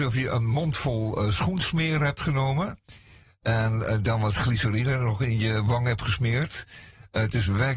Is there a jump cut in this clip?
no; 0 cuts

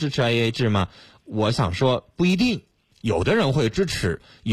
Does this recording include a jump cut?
no; 0 cuts

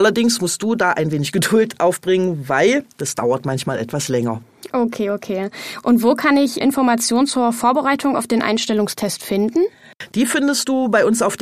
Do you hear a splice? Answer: yes; 1 cut; at 6.6 s

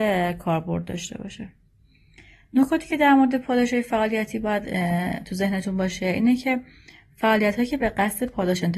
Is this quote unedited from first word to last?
yes; 0 cuts

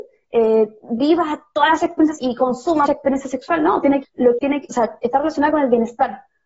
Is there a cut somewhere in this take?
yes; 4 cuts; at 2.2 s, 2.9 s, 4.0 s, 4.4 s

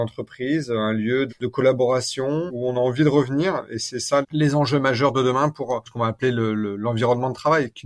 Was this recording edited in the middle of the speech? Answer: yes; 3 cuts; at 1.3 s, 2.5 s, 4.2 s

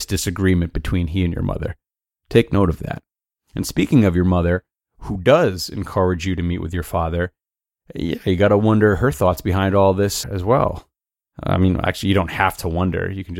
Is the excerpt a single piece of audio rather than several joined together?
no; 1 cut; at 10.2 s

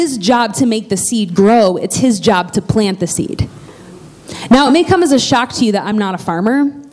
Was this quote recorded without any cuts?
yes; 0 cuts

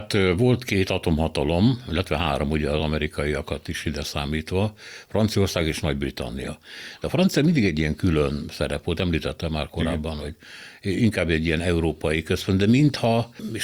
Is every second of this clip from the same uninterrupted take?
yes; 0 cuts

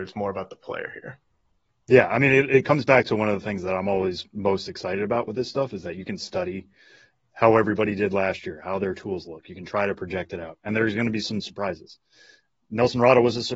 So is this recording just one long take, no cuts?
yes; 0 cuts

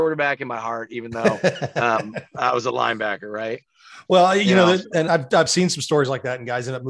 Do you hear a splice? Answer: no; 0 cuts

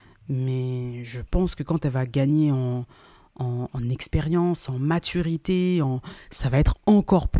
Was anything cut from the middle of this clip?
no; 0 cuts

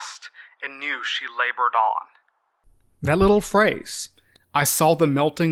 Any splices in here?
no; 0 cuts

